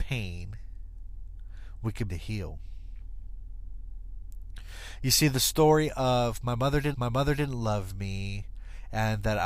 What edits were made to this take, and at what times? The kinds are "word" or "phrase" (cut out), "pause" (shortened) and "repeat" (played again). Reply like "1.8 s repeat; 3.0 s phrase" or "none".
2.1 s word; 6.9 s repeat